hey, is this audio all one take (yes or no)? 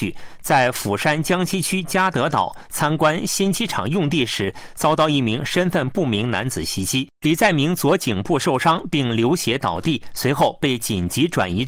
no